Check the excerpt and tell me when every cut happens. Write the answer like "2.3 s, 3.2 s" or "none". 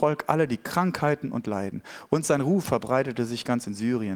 none